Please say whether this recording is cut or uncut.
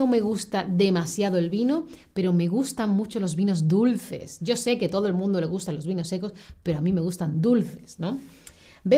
uncut